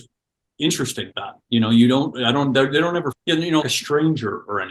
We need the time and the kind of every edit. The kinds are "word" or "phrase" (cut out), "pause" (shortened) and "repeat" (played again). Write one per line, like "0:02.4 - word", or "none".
0:01.1 - word
0:03.1 - word
0:03.6 - word